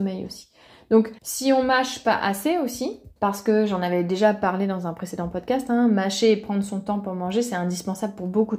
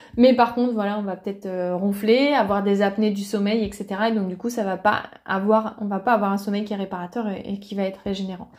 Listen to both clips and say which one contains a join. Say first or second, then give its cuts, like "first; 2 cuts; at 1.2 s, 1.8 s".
first; 2 cuts; at 1.2 s, 3.2 s